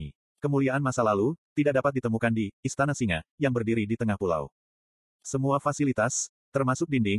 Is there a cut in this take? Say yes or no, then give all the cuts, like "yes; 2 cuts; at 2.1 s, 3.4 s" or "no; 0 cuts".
no; 0 cuts